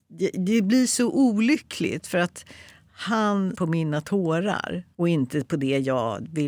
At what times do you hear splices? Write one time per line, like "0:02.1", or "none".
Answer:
0:03.5
0:04.9